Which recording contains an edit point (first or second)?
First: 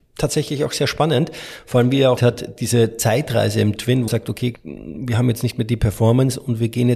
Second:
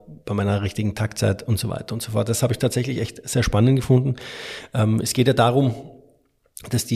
first